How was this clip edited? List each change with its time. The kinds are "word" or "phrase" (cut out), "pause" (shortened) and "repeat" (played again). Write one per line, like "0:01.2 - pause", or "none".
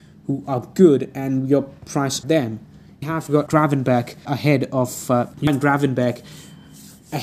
0:02.2 - word
0:03.0 - word
0:03.5 - word
0:04.3 - word
0:05.3 - pause